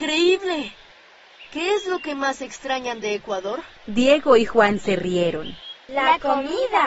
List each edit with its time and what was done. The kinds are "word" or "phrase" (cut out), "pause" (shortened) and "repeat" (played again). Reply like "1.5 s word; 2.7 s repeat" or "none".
3.8 s pause

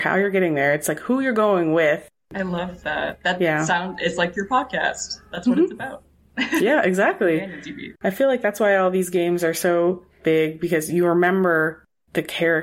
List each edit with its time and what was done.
8.0 s pause

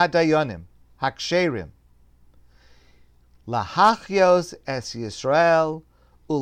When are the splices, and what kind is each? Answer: none

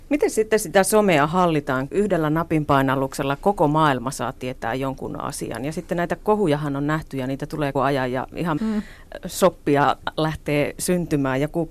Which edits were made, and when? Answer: 1.9 s word; 7.7 s word; 8.6 s word

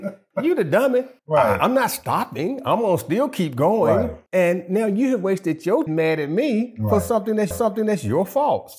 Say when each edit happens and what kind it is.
1.2 s pause; 4.3 s pause; 5.9 s phrase; 7.5 s repeat

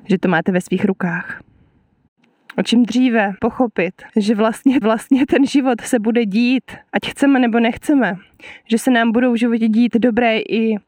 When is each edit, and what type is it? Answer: 3.4 s word; 4.1 s pause; 4.8 s repeat; 6.9 s pause

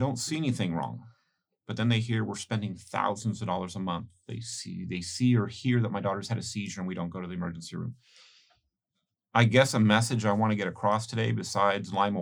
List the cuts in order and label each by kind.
none

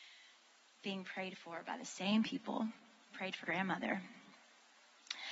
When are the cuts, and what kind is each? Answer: 3.1 s word; 3.4 s word

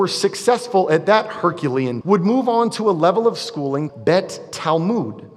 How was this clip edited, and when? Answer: 2.0 s word; 3.9 s word

